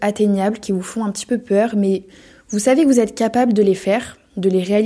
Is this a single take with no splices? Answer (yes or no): yes